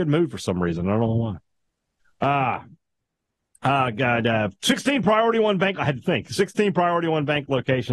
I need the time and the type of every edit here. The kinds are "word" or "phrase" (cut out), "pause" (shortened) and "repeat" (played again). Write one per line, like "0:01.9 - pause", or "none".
none